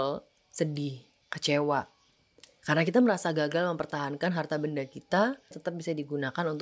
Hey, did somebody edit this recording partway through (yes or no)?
yes